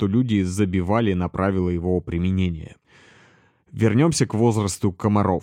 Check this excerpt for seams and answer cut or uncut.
uncut